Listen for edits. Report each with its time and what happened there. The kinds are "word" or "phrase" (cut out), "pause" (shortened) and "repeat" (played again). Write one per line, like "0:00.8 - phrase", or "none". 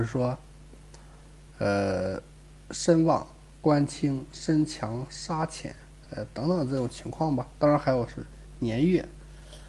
none